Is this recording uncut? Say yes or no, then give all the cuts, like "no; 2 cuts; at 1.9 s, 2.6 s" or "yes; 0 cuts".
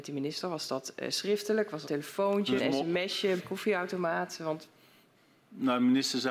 no; 3 cuts; at 1.8 s, 2.6 s, 3.4 s